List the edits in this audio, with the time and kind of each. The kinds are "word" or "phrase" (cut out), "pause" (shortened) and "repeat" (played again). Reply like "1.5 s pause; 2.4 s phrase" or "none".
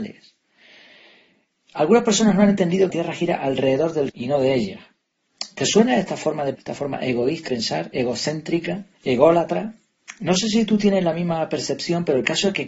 2.9 s phrase; 4.1 s word; 6.5 s word; 7.5 s word; 8.9 s pause